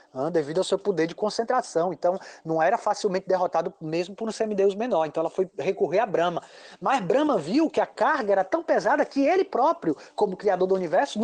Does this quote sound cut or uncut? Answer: uncut